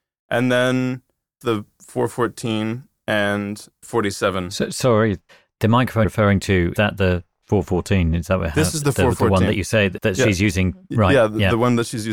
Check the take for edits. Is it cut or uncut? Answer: cut